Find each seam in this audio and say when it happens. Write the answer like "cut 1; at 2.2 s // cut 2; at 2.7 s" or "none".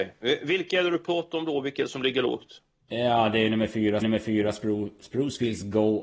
cut 1; at 4.0 s